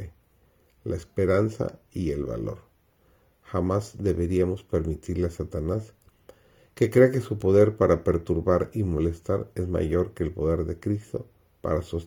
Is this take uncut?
yes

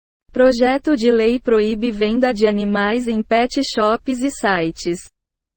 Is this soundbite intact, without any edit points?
yes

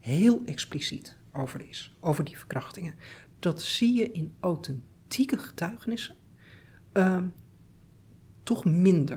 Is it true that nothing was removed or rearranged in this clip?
yes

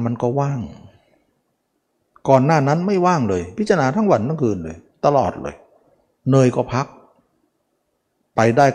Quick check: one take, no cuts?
yes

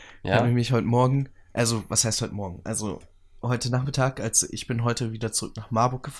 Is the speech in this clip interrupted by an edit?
no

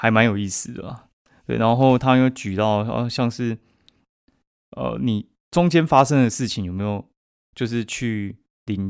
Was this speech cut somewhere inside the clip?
no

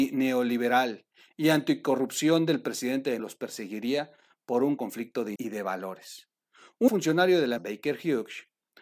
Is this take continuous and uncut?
no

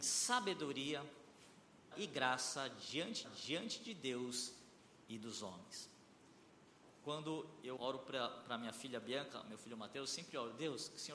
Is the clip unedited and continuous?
no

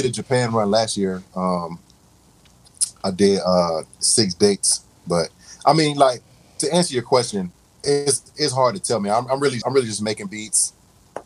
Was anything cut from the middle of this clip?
yes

